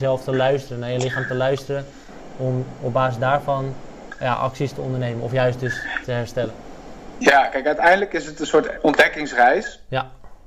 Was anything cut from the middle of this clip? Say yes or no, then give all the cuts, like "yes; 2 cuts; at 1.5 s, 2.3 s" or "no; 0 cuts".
no; 0 cuts